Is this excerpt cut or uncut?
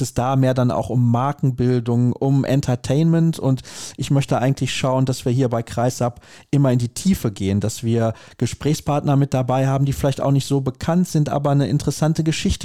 uncut